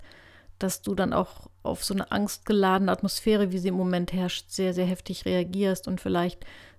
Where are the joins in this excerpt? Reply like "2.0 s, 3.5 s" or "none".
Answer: none